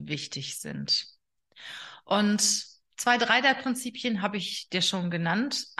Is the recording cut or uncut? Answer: uncut